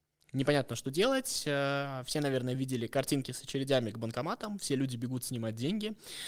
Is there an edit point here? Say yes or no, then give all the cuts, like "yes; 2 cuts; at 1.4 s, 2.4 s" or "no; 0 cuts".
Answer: no; 0 cuts